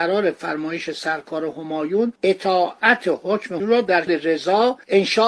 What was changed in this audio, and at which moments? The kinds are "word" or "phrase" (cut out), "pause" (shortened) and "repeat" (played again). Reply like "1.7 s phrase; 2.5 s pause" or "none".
2.2 s pause; 3.6 s word; 4.1 s word

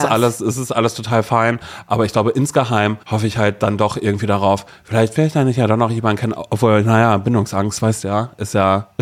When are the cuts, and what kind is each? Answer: 3.0 s pause

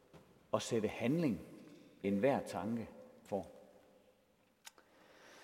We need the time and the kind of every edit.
2.0 s word; 3.3 s word

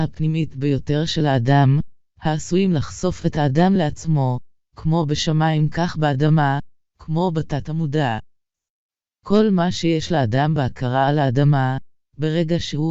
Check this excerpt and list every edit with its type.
none

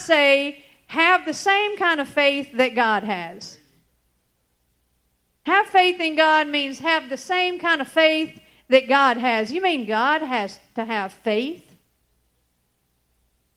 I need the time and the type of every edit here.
none

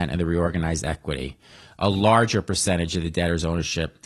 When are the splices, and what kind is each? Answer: none

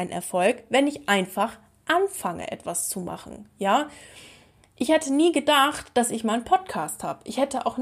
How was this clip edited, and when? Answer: none

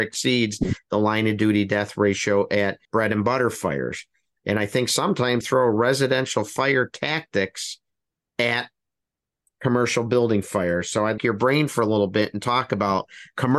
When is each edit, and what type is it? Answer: 2.8 s pause; 5.4 s phrase; 8.2 s pause; 11.2 s phrase

